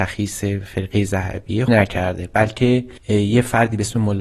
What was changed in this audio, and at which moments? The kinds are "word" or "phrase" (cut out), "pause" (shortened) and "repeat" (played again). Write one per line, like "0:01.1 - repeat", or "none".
0:01.7 - phrase
0:03.0 - pause